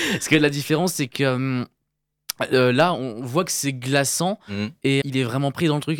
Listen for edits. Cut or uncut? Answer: cut